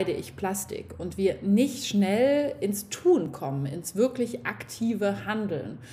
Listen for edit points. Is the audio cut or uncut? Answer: uncut